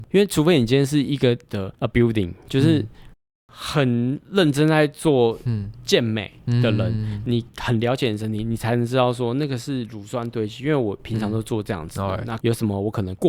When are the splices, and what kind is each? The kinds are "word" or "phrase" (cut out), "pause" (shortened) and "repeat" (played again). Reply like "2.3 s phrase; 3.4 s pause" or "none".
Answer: 1.5 s word; 1.9 s word